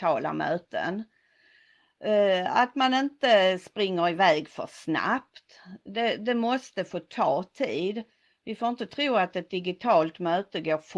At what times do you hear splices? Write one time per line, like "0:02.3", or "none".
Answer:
none